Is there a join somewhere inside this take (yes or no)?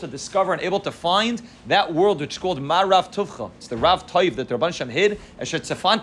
no